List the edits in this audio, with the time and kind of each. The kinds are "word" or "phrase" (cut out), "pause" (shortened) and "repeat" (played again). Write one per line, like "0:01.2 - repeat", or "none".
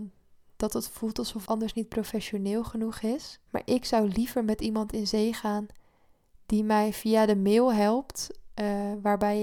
0:01.5 - word
0:03.5 - pause